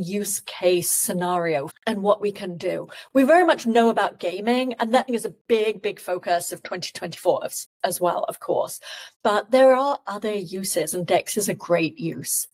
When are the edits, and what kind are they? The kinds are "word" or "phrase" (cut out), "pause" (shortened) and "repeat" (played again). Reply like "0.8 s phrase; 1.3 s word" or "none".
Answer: 1.7 s phrase; 5.1 s phrase; 9.1 s pause